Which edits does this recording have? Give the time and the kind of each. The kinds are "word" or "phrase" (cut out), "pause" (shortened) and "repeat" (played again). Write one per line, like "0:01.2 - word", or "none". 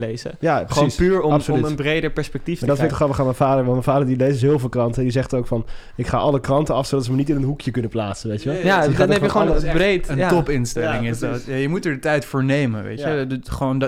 0:02.9 - word